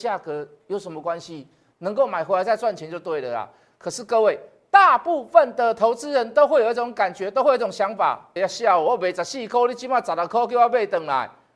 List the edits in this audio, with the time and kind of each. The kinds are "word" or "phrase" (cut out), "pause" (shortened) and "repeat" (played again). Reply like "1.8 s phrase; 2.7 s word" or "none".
8.4 s word